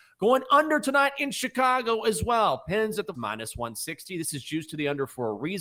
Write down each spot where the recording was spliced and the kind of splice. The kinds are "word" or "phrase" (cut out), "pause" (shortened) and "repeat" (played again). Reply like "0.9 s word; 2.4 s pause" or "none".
3.1 s word